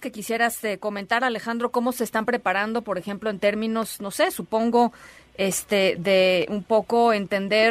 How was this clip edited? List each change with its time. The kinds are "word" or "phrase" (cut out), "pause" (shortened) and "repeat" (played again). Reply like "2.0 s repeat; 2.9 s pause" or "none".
6.0 s word